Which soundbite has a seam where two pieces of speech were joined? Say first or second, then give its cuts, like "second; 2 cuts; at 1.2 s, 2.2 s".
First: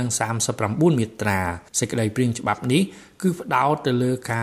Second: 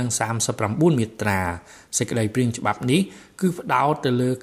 first; 1 cut; at 1.7 s